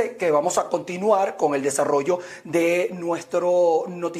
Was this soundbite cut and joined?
no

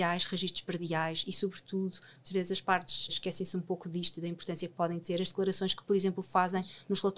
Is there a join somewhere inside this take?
yes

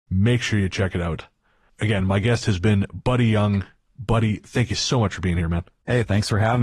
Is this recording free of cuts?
yes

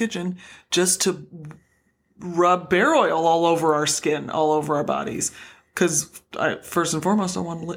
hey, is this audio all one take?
yes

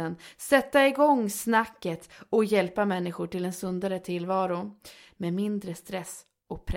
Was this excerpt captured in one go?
yes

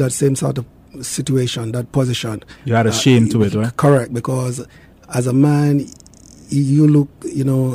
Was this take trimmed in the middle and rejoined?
no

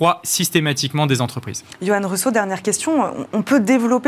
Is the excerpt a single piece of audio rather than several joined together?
yes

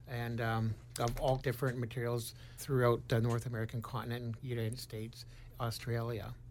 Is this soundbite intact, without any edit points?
no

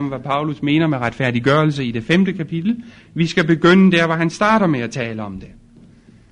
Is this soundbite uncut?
yes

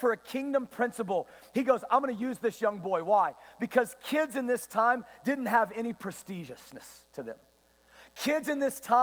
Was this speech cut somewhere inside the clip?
no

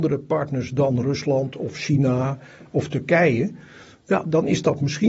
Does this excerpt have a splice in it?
no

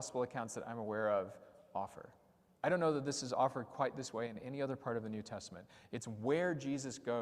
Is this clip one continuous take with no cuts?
yes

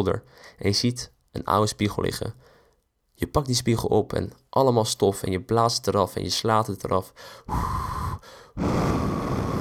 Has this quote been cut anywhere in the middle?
no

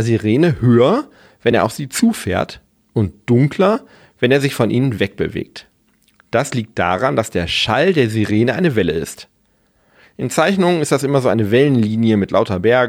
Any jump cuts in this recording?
no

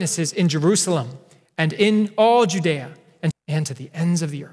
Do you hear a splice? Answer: yes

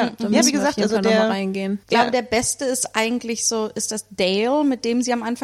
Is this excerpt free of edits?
no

